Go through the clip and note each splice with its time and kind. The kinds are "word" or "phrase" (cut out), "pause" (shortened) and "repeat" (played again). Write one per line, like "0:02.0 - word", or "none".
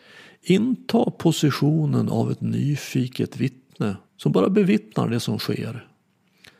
0:04.0 - pause

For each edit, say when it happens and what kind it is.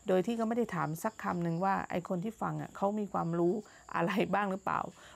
none

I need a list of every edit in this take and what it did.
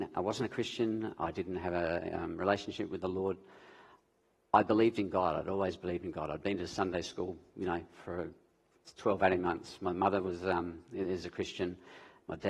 none

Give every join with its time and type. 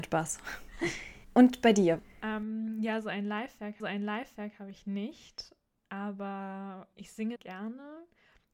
0:01.2 - pause
0:02.1 - pause
0:03.8 - repeat
0:06.9 - word
0:07.4 - word

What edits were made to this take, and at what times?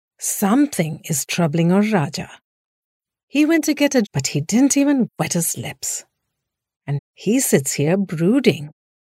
0:04.0 - phrase
0:07.0 - word

